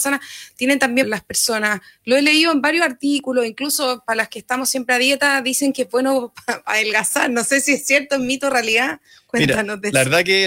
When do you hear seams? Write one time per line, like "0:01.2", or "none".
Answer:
0:01.0